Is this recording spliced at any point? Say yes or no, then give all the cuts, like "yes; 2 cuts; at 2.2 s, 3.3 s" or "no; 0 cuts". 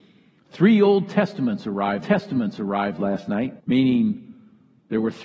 yes; 2 cuts; at 2.0 s, 3.6 s